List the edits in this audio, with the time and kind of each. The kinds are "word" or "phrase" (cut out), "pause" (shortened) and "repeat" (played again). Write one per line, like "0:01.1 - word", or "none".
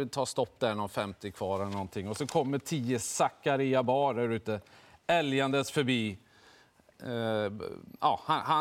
none